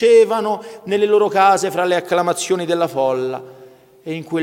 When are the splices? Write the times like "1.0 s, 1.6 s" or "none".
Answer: none